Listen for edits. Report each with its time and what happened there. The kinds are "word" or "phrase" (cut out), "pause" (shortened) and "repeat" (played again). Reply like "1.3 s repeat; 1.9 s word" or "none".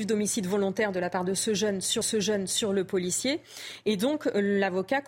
2.0 s repeat

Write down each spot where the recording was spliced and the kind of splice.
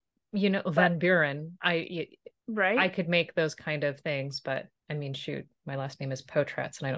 2.4 s pause; 4.8 s pause

